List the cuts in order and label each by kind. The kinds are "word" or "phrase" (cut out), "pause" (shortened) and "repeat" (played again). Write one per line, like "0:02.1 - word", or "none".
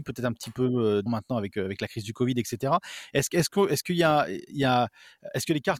0:01.1 - word